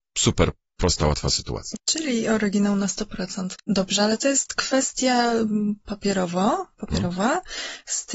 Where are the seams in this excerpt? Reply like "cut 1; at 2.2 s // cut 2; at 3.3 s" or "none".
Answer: cut 1; at 3.6 s

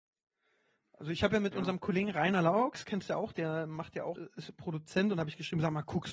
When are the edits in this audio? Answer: cut 1; at 4.2 s

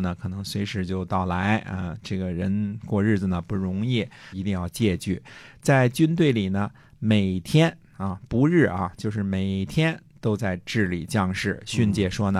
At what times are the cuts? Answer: cut 1; at 4.3 s

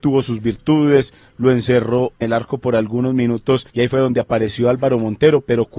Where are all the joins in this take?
cut 1; at 2.2 s // cut 2; at 3.7 s

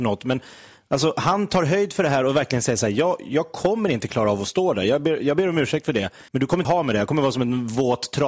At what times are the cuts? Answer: cut 1; at 6.3 s // cut 2; at 6.6 s

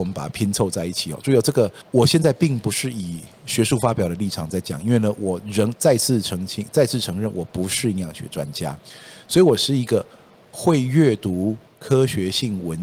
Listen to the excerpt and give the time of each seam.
none

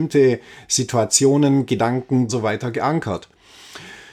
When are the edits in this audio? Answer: cut 1; at 2.3 s

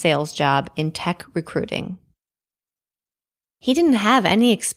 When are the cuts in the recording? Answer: none

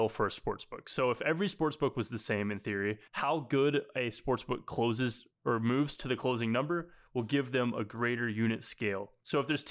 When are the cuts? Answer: cut 1; at 3.1 s

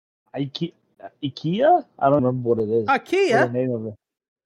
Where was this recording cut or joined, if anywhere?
cut 1; at 2.2 s

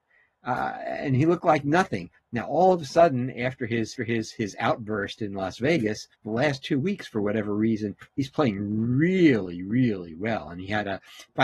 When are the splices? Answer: cut 1; at 4.0 s // cut 2; at 6.1 s

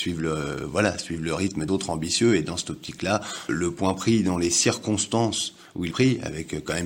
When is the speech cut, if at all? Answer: cut 1; at 1.7 s // cut 2; at 3.5 s // cut 3; at 5.9 s

